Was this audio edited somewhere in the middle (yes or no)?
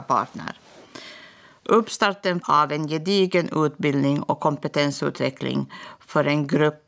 yes